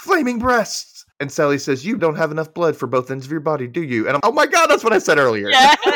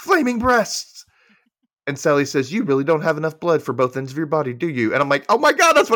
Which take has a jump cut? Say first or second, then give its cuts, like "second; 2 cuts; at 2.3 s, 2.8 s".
first; 3 cuts; at 1.1 s, 2.0 s, 4.2 s